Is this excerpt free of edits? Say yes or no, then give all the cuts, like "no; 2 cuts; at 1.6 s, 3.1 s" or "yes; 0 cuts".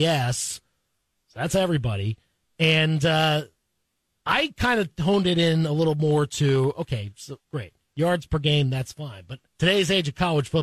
no; 2 cuts; at 7.4 s, 9.5 s